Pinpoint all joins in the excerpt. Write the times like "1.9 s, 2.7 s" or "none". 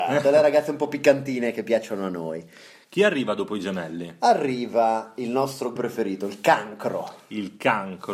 5.8 s